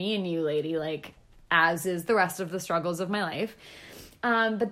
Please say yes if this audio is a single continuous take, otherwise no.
yes